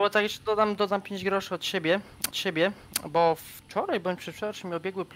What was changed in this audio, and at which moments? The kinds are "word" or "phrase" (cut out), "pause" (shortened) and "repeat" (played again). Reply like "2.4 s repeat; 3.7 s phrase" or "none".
2.3 s repeat